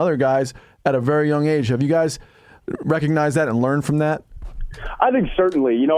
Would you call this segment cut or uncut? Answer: uncut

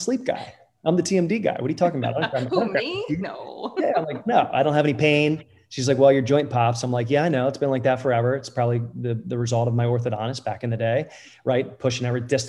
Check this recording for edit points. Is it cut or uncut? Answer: uncut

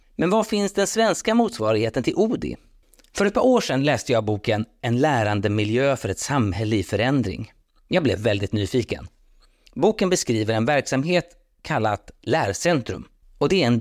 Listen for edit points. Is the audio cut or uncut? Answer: uncut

